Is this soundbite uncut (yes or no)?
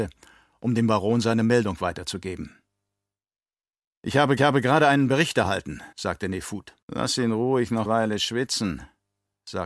no